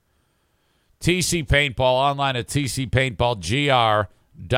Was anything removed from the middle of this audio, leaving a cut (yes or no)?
no